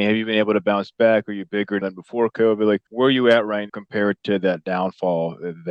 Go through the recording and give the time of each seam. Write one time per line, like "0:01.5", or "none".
0:01.8
0:02.9
0:03.7